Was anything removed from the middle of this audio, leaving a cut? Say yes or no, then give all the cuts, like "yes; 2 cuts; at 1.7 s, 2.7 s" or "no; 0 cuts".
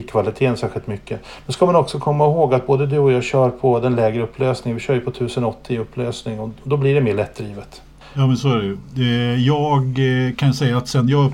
yes; 1 cut; at 8.0 s